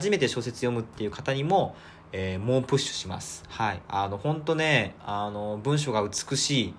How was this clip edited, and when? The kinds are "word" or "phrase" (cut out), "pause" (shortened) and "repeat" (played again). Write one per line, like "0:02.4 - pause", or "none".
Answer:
0:03.8 - pause